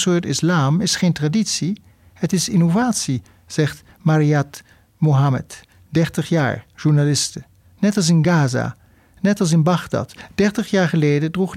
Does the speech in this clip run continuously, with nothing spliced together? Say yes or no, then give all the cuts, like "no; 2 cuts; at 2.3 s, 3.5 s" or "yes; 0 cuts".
yes; 0 cuts